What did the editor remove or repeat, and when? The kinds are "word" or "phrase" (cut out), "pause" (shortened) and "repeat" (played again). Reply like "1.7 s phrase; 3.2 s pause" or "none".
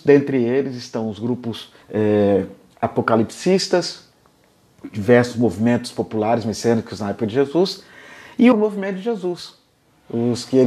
1.8 s pause; 8.5 s phrase